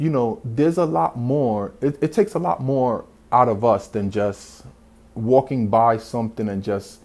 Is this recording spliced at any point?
no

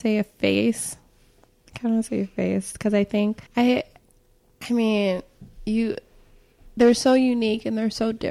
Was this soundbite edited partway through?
yes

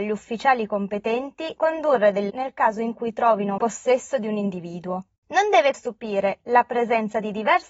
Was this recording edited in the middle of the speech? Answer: yes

